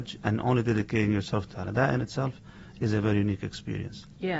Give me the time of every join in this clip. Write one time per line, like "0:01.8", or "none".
0:01.5

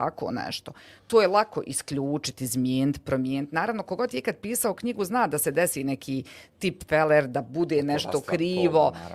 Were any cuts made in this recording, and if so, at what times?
none

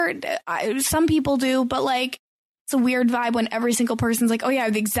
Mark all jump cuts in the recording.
none

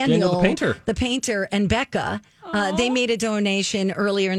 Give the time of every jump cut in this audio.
0:02.3

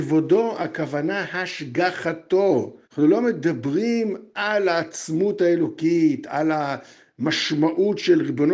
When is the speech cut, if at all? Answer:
0:02.8

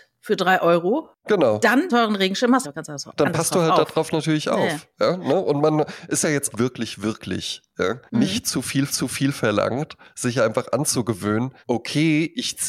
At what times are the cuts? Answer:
0:01.9
0:02.6
0:06.2
0:06.5
0:08.1
0:08.9
0:11.6

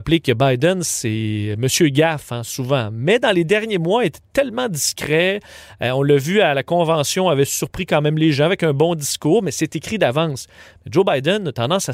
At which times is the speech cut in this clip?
none

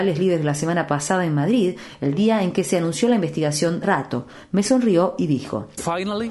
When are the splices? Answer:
0:03.8

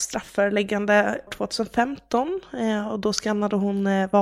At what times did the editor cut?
0:01.3

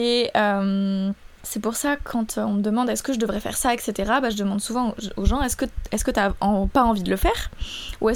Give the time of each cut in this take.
0:01.3

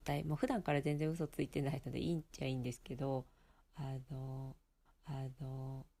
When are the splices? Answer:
0:04.9

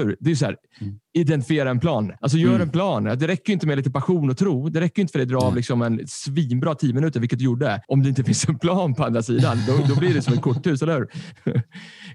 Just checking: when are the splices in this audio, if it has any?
0:02.2
0:07.8

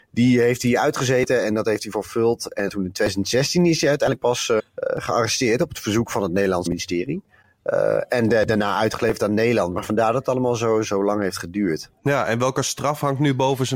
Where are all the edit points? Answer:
0:02.7
0:04.6
0:06.7
0:10.8

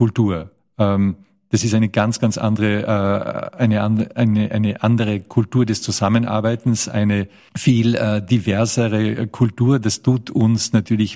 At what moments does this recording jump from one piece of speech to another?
none

